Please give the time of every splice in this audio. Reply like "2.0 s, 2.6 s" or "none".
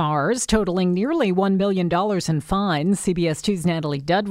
none

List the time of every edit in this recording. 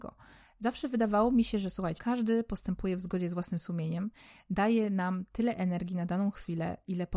2.0 s

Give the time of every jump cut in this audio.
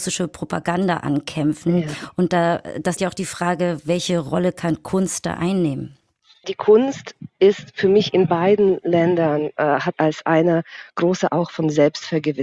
3.0 s, 9.9 s, 11.3 s

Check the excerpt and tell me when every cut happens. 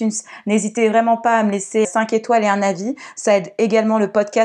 1.8 s

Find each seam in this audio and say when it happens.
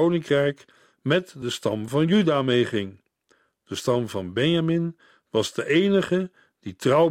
none

